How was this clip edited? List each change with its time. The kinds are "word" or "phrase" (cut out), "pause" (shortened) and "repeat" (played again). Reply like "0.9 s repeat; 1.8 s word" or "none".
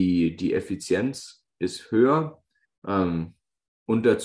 2.7 s pause